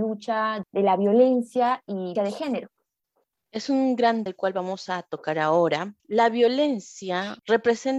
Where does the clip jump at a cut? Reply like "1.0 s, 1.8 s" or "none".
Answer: 2.2 s, 4.3 s, 6.0 s